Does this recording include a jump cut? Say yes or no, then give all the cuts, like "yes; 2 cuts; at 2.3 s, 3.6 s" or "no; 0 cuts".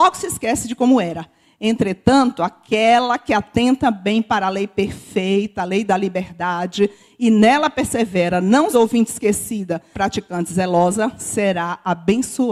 yes; 2 cuts; at 8.7 s, 9.9 s